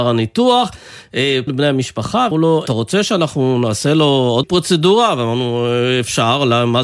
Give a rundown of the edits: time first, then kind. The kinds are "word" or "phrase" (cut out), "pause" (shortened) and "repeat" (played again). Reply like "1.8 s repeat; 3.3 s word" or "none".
1.5 s word; 2.3 s word; 2.7 s word; 4.4 s word